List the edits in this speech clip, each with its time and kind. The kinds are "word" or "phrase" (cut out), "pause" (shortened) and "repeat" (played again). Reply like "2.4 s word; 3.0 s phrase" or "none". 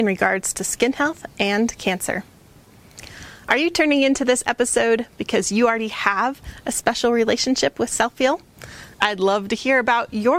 none